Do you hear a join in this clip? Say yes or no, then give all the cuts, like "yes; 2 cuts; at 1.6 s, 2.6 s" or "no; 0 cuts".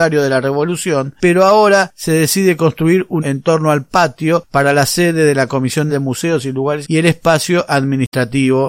yes; 3 cuts; at 3.2 s, 5.9 s, 6.8 s